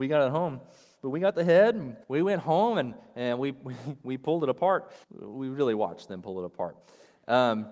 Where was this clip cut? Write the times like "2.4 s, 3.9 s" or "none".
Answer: 2.0 s, 5.0 s